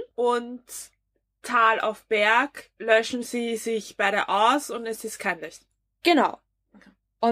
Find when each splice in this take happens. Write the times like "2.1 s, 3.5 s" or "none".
none